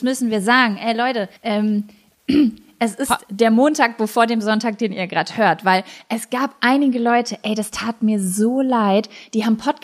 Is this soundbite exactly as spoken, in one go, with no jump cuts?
no; 1 cut; at 1.4 s

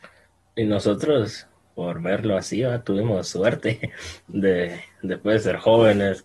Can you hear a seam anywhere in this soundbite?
no; 0 cuts

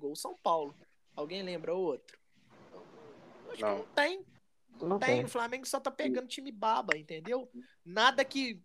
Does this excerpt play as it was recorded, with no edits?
yes; 0 cuts

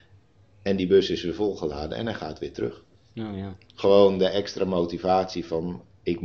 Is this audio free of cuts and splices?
yes; 0 cuts

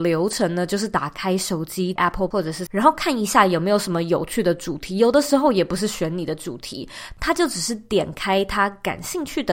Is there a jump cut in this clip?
yes; 3 cuts; at 2.0 s, 2.3 s, 2.7 s

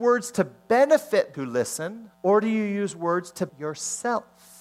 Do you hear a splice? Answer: yes; 3 cuts; at 1.3 s, 2.1 s, 3.5 s

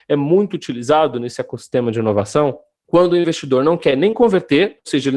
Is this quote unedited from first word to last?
yes; 0 cuts

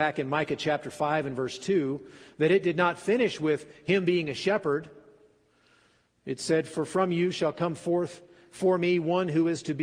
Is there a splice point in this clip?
no; 0 cuts

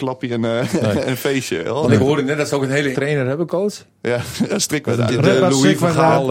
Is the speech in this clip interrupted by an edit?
yes; 2 cuts; at 2.9 s, 5.1 s

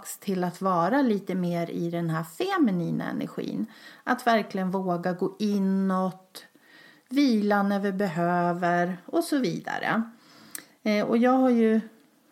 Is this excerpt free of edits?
yes; 0 cuts

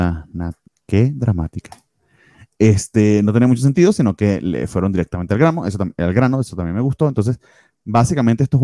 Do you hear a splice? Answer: no; 0 cuts

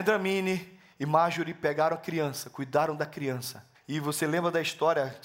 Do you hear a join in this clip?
yes; 1 cut; at 3.7 s

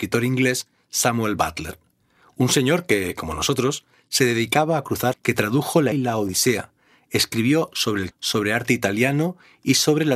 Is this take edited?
yes; 3 cuts; at 5.1 s, 5.9 s, 8.1 s

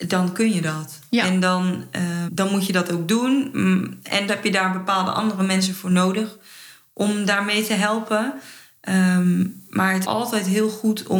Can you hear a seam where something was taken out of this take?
yes; 3 cuts; at 2.3 s, 4.3 s, 10.0 s

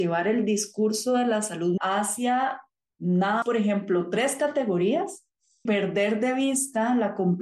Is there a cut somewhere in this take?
yes; 3 cuts; at 1.8 s, 3.4 s, 5.7 s

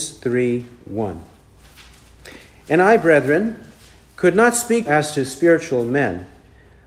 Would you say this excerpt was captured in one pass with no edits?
no; 1 cut; at 4.9 s

